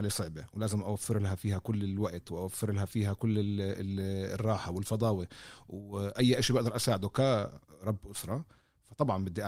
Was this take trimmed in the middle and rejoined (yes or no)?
no